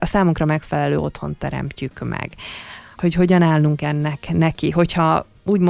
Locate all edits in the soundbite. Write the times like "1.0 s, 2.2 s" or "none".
3.0 s